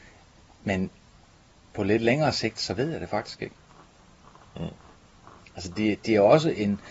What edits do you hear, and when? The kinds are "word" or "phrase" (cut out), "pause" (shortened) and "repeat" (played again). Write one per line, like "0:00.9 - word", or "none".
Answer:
none